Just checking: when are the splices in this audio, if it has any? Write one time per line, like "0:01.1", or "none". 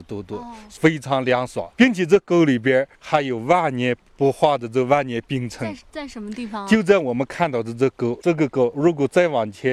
0:01.7
0:02.9